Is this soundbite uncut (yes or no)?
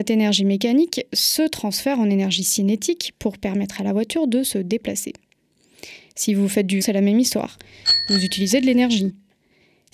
no